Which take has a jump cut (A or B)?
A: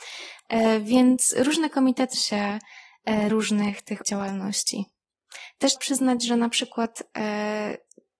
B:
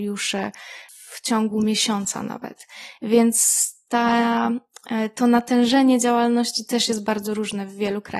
A